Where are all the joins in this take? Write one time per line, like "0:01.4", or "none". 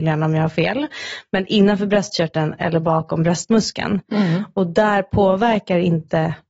none